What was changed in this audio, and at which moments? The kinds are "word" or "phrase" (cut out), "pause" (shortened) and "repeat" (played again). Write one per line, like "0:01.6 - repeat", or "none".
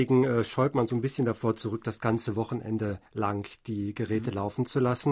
0:03.1 - pause